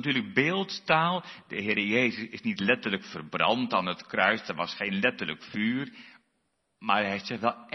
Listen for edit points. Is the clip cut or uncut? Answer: uncut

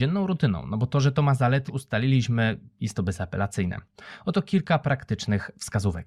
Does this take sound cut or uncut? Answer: cut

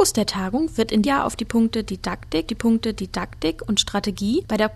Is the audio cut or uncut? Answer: cut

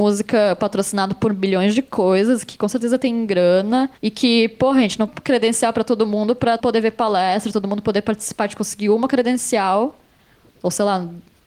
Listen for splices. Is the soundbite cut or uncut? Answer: cut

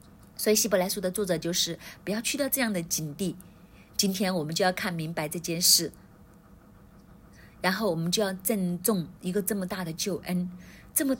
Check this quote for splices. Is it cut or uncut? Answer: cut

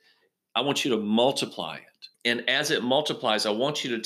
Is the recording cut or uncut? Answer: cut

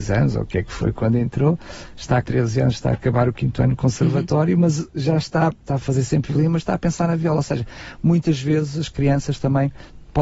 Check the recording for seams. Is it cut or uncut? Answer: cut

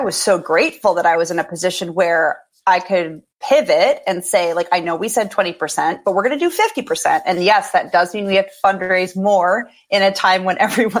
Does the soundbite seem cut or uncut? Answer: cut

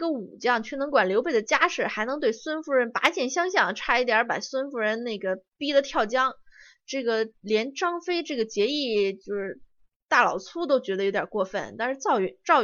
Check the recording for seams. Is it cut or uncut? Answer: uncut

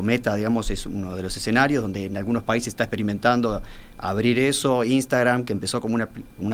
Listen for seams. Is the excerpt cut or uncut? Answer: uncut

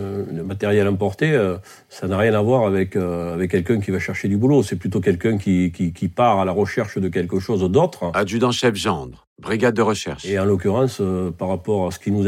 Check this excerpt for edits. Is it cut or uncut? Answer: uncut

